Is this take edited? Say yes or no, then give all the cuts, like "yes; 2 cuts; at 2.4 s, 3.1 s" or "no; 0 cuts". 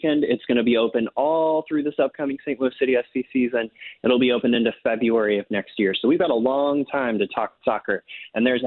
no; 0 cuts